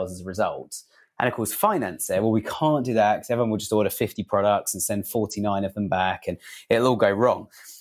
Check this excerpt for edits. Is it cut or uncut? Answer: uncut